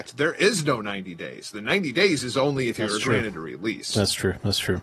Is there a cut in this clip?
no; 0 cuts

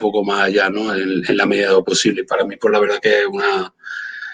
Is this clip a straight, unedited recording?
yes; 0 cuts

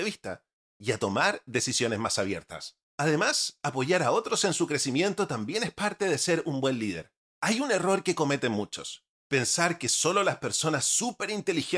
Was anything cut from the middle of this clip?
yes; 3 cuts; at 2.8 s, 7.2 s, 9.1 s

